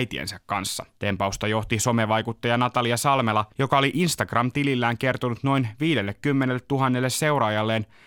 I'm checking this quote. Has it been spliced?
yes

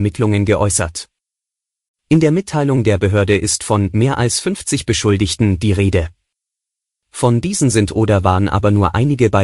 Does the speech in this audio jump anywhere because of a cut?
no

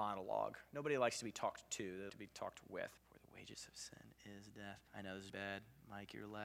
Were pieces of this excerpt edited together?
yes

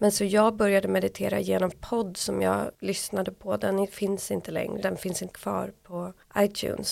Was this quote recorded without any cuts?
no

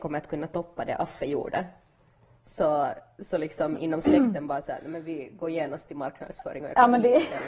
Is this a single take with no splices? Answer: yes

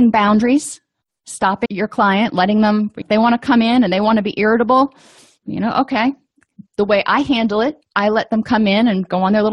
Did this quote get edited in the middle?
yes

